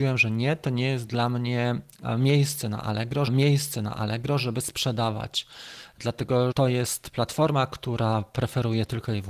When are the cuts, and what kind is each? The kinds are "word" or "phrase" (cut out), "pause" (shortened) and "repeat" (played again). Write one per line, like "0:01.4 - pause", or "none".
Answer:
0:03.3 - repeat
0:06.5 - word